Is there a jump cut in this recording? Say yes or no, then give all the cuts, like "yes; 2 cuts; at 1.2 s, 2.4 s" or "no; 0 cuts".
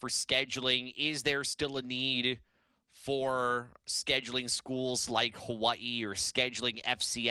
no; 0 cuts